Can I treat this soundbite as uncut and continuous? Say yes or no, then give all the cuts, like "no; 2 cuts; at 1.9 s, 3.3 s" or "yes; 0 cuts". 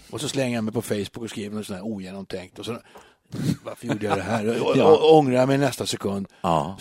yes; 0 cuts